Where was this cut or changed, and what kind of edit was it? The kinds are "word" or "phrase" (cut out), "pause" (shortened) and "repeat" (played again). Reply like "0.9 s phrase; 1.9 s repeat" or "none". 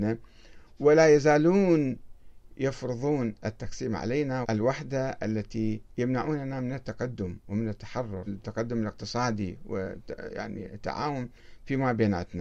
4.4 s word; 5.9 s pause; 8.3 s word